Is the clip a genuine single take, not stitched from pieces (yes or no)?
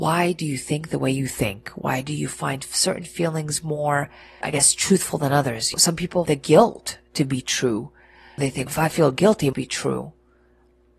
no